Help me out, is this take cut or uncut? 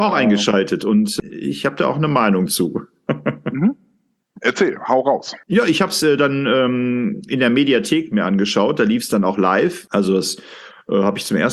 uncut